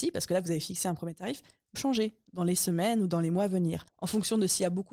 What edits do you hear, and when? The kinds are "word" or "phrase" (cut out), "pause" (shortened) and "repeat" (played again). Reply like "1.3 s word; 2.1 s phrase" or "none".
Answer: 1.8 s word; 3.9 s pause